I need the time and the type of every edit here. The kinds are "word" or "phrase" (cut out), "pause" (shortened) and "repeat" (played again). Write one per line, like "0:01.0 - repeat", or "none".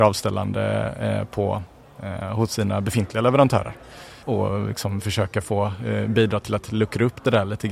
0:04.2 - pause